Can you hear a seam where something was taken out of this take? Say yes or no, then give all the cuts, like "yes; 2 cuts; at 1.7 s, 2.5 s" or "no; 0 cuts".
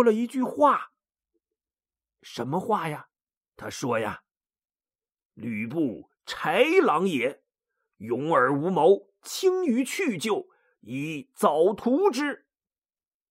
yes; 1 cut; at 3.2 s